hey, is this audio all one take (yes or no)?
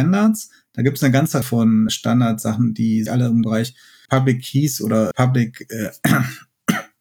no